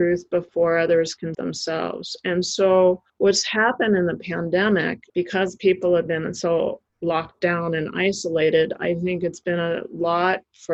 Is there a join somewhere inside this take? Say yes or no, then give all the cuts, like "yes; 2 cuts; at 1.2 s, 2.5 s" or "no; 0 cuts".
yes; 4 cuts; at 1.3 s, 3.1 s, 5.1 s, 6.9 s